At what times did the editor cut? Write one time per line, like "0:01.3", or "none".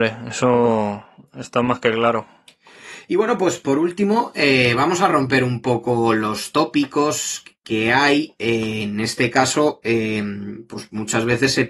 none